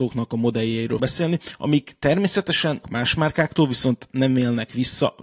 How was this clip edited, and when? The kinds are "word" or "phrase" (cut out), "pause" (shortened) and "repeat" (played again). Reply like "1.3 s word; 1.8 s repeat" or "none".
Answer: 1.0 s word; 2.8 s word